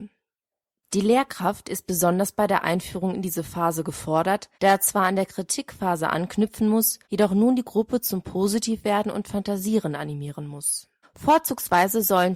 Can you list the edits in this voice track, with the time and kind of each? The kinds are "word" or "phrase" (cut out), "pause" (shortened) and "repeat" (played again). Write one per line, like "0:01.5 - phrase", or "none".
0:04.5 - pause
0:07.0 - pause
0:11.0 - pause